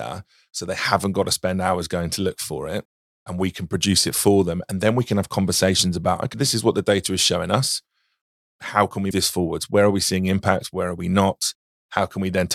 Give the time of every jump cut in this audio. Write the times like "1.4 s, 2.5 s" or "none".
6.3 s, 9.1 s